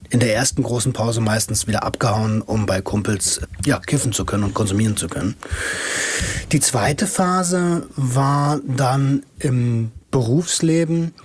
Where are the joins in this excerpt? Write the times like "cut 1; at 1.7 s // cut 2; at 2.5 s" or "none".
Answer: cut 1; at 9.4 s